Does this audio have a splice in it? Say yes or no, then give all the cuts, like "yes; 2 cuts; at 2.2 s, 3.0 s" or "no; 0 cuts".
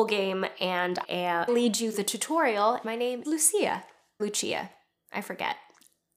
yes; 6 cuts; at 1.0 s, 1.5 s, 1.9 s, 2.8 s, 3.2 s, 4.2 s